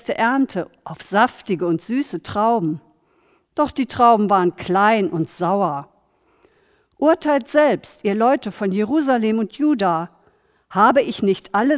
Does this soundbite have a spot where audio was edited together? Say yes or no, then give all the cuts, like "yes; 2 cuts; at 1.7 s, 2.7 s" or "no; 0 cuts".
no; 0 cuts